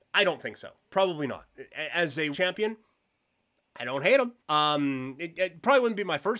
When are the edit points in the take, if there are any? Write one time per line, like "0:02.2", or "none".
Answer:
0:02.3
0:04.4